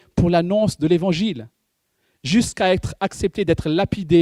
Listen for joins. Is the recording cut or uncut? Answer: uncut